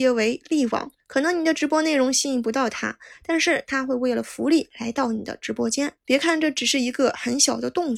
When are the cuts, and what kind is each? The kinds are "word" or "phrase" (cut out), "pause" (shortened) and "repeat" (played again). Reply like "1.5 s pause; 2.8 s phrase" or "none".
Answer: 1.0 s pause; 6.0 s pause